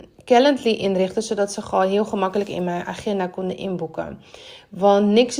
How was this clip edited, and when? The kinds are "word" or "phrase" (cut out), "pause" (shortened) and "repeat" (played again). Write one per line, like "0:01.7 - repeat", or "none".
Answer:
none